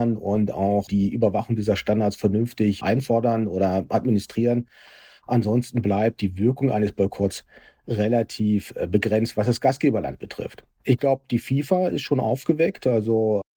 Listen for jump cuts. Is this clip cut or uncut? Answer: uncut